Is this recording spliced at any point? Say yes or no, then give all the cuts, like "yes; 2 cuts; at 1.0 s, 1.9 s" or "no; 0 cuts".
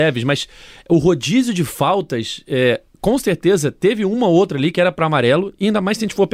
no; 0 cuts